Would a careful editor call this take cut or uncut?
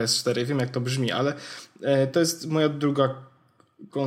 uncut